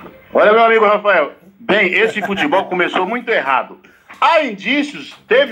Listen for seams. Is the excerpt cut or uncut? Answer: uncut